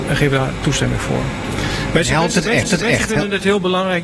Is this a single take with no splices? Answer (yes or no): no